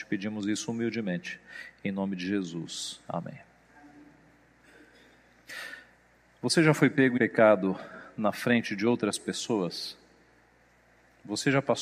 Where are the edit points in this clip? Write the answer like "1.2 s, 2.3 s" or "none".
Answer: 7.2 s